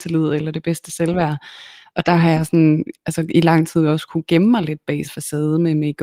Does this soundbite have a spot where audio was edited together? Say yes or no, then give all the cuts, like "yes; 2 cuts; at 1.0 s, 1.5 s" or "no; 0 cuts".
yes; 1 cut; at 5.0 s